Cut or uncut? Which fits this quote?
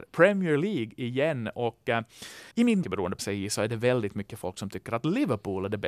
cut